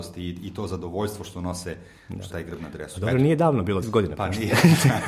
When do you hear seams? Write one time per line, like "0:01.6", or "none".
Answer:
0:02.3
0:03.8